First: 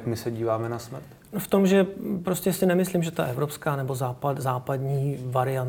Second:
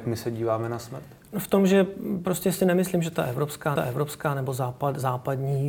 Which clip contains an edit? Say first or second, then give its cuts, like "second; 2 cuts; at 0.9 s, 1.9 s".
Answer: second; 1 cut; at 3.8 s